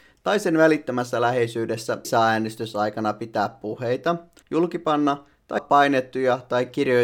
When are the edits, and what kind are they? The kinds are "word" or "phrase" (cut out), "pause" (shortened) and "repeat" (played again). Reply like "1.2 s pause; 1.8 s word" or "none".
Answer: 2.0 s word; 4.4 s pause; 5.6 s word